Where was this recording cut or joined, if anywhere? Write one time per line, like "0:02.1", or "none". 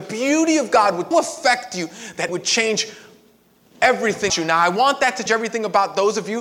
0:01.1
0:02.3
0:04.3
0:05.3